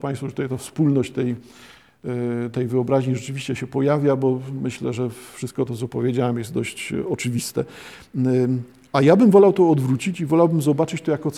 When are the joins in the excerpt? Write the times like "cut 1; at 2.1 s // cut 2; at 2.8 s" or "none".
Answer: none